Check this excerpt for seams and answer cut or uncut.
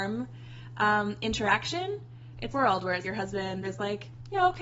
cut